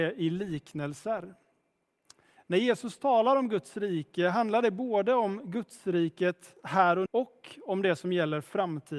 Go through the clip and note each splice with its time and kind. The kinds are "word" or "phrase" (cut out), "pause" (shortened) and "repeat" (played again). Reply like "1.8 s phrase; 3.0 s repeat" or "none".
7.1 s word